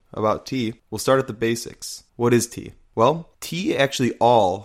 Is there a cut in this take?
yes; 2 cuts; at 2.1 s, 3.3 s

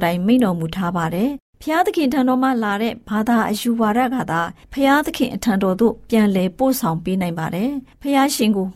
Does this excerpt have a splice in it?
no; 0 cuts

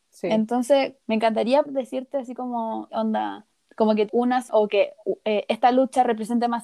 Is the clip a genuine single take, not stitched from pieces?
no; 6 cuts; at 1.0 s, 1.6 s, 2.9 s, 3.5 s, 4.1 s, 4.5 s

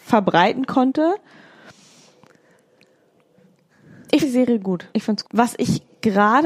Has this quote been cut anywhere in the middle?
yes; 3 cuts; at 4.2 s, 4.9 s, 5.2 s

